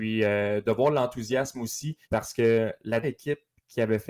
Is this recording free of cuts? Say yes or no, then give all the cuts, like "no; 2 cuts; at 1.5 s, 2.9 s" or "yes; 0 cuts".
no; 2 cuts; at 2.0 s, 3.0 s